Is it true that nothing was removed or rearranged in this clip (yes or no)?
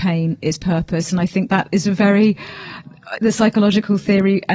no